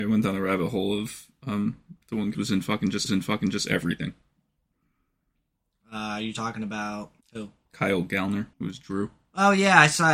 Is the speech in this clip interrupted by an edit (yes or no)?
yes